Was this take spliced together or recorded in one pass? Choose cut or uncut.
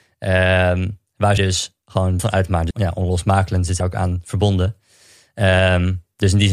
cut